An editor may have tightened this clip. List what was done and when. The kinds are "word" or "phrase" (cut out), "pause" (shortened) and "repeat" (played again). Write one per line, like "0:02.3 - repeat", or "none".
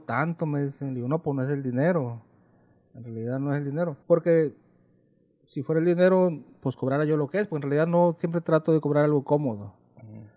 0:04.0 - pause